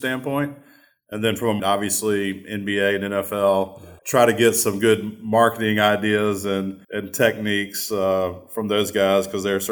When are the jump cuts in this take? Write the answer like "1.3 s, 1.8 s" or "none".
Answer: 1.6 s, 4.0 s, 6.8 s